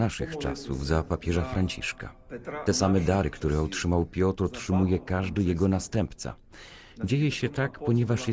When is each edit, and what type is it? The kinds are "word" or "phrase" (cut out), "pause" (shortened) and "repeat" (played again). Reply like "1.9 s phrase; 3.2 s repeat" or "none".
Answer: none